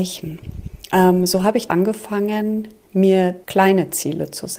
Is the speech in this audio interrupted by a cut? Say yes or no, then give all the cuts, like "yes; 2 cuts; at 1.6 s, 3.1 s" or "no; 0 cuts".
yes; 2 cuts; at 1.7 s, 3.4 s